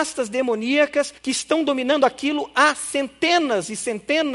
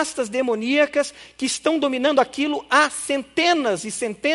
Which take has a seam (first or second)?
first